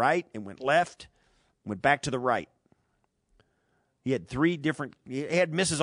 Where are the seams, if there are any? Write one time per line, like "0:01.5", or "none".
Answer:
none

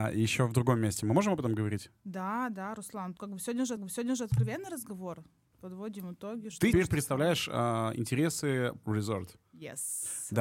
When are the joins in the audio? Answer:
0:03.2
0:03.8
0:05.5
0:06.7
0:08.8

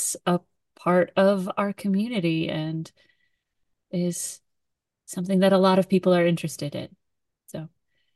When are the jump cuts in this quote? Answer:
none

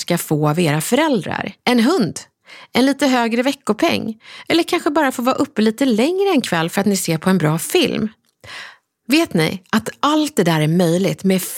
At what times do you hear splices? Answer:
0:01.6

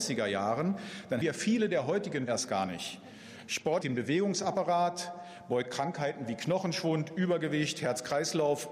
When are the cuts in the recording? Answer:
0:01.2
0:02.3
0:03.8

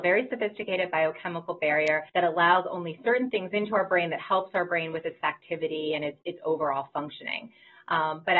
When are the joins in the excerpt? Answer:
0:02.1
0:05.2

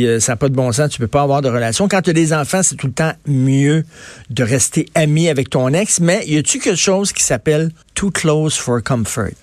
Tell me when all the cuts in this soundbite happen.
0:07.8

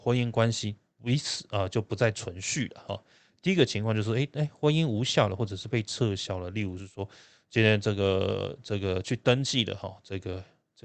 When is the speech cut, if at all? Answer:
none

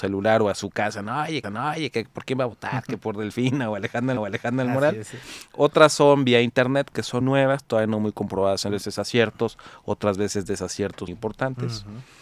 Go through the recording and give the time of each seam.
0:01.4
0:04.2
0:07.2
0:08.7
0:11.1

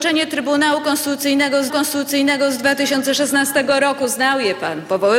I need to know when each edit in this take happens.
0:01.7

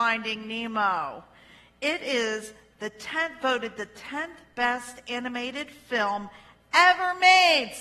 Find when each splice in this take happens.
none

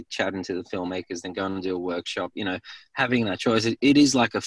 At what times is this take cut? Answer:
none

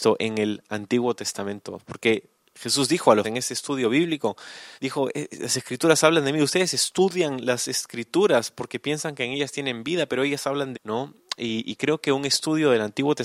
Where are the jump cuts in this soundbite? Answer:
0:03.2
0:04.7
0:10.7

